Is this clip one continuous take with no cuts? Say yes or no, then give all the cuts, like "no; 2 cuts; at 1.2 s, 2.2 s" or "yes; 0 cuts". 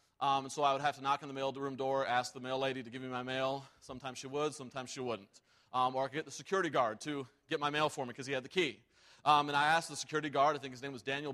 yes; 0 cuts